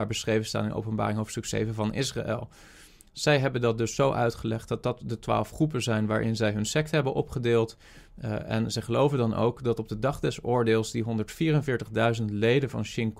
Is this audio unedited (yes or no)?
yes